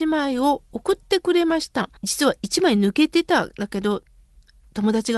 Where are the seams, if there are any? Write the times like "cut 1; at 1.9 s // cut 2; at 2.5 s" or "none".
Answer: cut 1; at 2.0 s

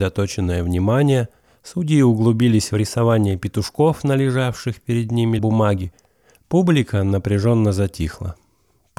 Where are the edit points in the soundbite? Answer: cut 1; at 1.4 s // cut 2; at 5.4 s

